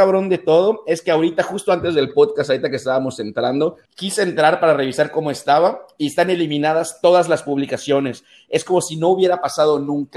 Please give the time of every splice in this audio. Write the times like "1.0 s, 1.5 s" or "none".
3.8 s